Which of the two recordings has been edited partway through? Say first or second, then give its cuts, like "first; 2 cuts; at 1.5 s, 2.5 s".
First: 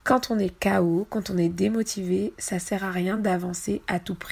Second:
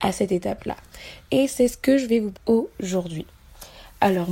second; 1 cut; at 2.3 s